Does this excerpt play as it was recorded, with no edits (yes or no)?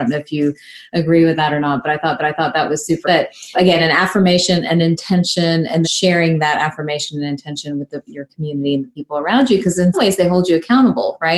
no